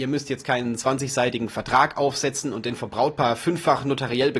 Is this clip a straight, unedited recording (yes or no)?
yes